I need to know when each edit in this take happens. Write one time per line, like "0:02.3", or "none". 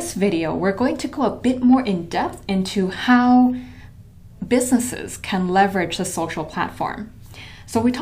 none